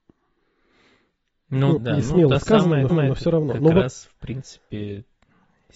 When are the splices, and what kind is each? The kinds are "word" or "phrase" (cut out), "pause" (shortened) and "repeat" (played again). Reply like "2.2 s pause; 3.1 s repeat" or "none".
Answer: 1.8 s word; 2.9 s repeat